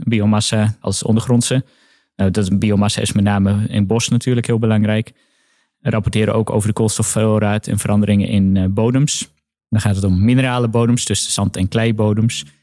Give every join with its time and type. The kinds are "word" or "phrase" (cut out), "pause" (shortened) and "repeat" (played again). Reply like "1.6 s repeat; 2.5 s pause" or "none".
none